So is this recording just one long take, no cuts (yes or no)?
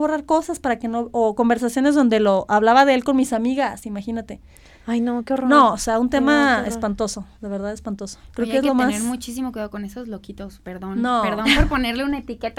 yes